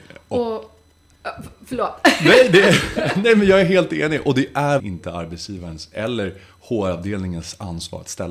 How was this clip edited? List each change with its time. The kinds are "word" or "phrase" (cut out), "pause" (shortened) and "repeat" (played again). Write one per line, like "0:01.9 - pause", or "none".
0:04.8 - word